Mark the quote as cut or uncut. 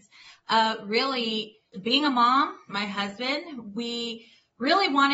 cut